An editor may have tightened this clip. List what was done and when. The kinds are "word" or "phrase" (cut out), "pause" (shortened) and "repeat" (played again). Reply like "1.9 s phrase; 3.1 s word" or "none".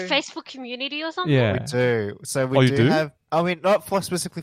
3.2 s pause